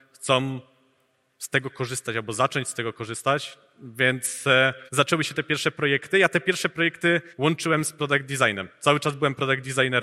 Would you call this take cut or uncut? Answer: cut